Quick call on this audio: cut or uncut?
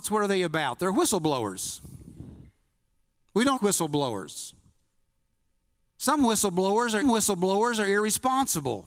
cut